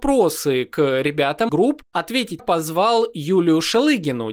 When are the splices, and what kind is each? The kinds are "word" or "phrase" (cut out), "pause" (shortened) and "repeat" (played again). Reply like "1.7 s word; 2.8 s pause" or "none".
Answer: 1.5 s phrase; 2.4 s phrase